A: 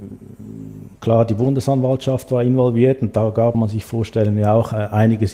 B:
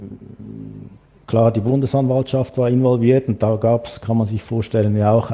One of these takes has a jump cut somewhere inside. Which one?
A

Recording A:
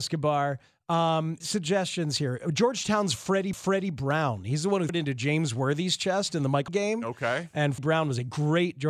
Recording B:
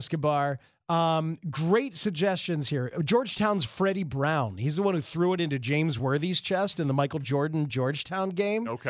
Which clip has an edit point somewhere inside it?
A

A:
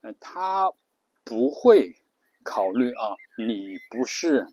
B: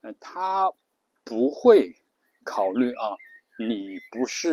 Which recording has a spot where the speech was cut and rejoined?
A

